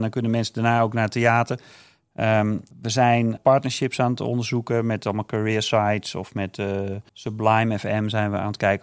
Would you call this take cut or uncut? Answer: cut